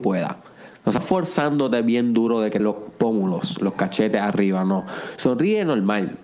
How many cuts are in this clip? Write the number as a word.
two